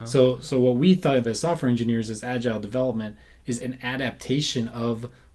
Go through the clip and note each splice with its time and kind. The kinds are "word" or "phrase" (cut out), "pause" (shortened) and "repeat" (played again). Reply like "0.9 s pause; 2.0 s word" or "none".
1.2 s phrase; 3.6 s word

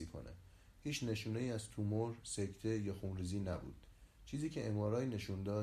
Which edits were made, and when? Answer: none

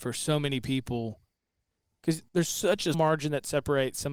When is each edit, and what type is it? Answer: 2.3 s pause; 2.9 s word

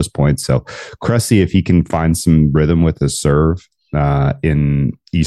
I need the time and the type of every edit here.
none

